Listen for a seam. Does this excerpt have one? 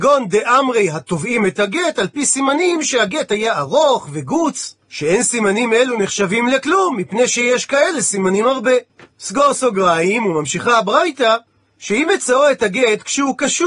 yes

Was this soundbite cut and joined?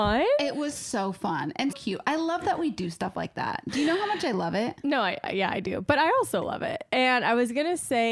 yes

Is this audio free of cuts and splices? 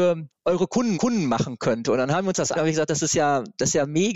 no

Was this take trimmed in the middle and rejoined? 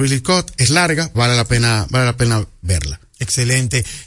yes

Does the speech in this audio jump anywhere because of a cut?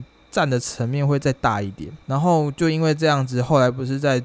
yes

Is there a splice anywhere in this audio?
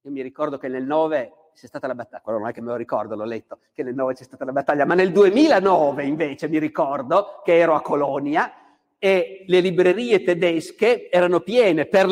no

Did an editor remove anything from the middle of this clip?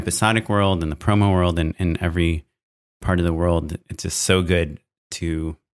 no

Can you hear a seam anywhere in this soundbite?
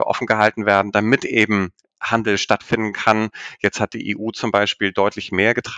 no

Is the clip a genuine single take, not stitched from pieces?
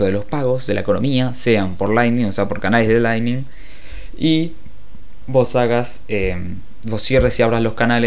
yes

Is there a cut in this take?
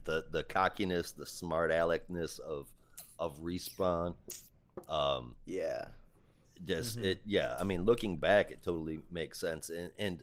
no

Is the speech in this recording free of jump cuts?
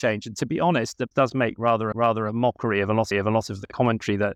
no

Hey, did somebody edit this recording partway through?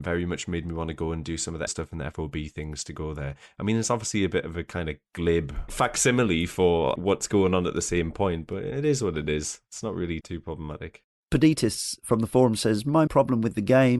yes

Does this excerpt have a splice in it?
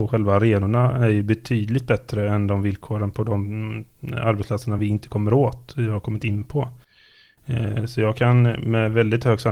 no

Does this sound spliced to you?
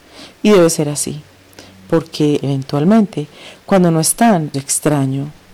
yes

